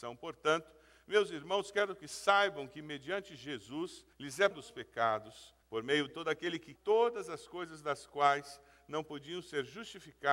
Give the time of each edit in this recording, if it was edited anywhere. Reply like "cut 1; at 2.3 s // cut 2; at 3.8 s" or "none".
cut 1; at 4.1 s // cut 2; at 4.5 s // cut 3; at 5.6 s // cut 4; at 6.1 s // cut 5; at 6.8 s